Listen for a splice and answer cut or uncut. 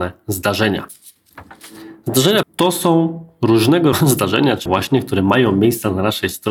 cut